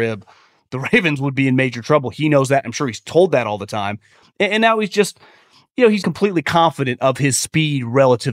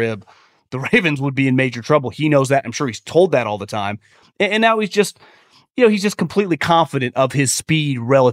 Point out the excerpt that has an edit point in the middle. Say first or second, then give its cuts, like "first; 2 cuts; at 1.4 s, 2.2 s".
first; 1 cut; at 6.0 s